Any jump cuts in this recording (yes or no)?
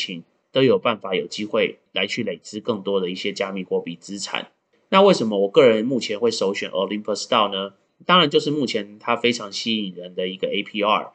no